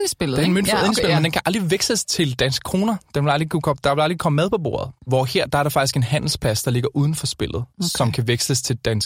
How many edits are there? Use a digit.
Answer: 2